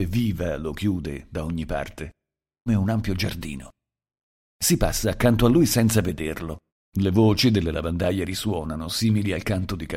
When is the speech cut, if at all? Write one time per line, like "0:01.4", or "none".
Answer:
0:02.7
0:06.7